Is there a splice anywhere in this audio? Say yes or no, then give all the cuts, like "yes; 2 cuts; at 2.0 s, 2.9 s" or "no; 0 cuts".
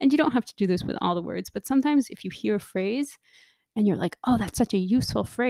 no; 0 cuts